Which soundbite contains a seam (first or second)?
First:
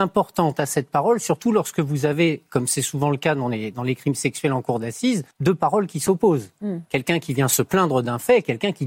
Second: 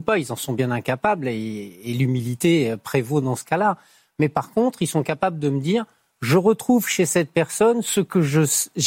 first